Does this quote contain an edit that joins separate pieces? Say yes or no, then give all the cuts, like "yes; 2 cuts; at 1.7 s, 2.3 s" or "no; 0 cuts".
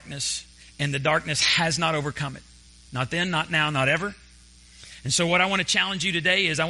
no; 0 cuts